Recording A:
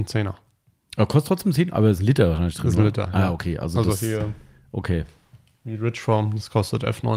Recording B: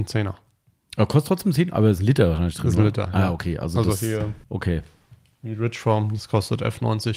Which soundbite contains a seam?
B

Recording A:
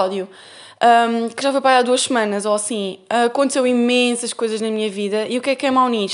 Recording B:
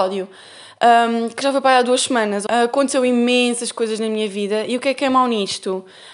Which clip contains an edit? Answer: B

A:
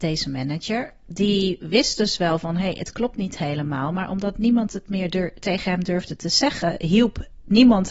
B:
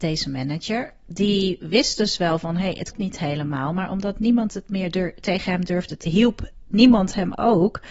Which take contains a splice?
B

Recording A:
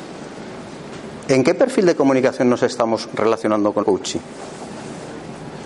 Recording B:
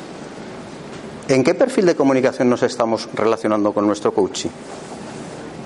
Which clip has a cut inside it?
A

